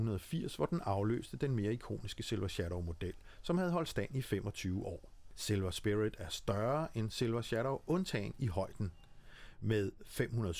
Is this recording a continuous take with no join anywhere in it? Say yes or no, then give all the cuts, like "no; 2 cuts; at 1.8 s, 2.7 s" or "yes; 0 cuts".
yes; 0 cuts